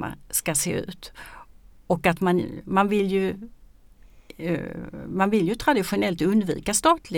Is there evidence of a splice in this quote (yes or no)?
no